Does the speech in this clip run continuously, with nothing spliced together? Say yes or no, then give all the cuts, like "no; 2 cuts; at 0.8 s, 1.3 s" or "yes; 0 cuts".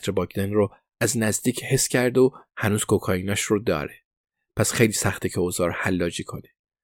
yes; 0 cuts